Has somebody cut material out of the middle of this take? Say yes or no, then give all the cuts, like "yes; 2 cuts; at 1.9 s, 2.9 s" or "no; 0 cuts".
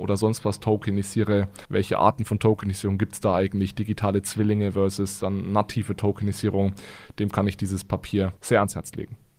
yes; 2 cuts; at 1.6 s, 8.4 s